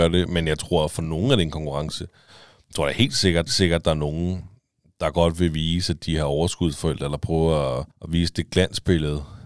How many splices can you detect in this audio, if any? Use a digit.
2